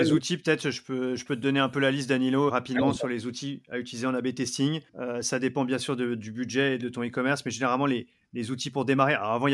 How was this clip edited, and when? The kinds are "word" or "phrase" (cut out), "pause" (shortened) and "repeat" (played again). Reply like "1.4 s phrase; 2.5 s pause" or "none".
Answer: 2.5 s word; 4.9 s pause; 6.8 s phrase